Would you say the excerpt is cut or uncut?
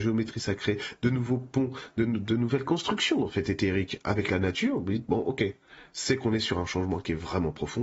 uncut